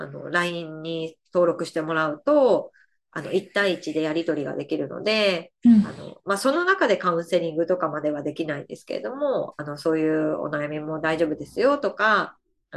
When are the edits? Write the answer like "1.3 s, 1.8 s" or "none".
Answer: none